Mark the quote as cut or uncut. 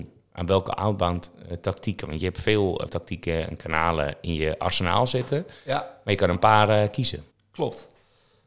cut